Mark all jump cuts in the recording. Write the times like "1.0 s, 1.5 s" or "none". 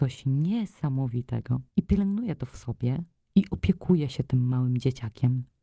1.7 s